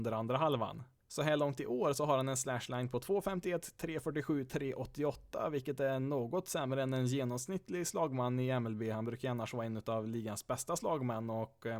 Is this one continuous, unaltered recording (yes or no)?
yes